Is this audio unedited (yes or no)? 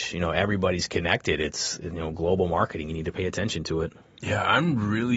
yes